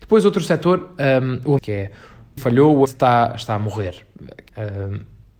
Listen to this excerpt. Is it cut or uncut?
cut